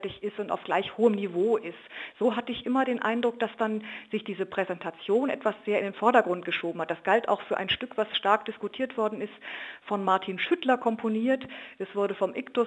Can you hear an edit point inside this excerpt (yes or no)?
no